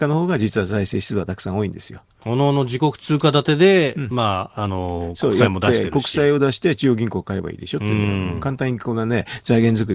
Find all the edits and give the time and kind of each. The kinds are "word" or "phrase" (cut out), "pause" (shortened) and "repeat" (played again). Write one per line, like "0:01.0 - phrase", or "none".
none